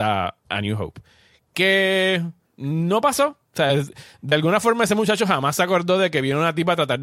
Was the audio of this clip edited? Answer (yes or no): yes